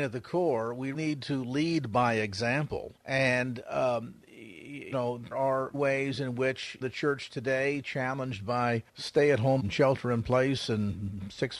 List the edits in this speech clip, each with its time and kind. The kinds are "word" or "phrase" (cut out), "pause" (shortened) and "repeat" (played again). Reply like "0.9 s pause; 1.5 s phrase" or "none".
0.9 s word; 3.0 s pause; 4.9 s word; 5.3 s word; 5.7 s word; 6.8 s word; 8.9 s pause; 9.6 s word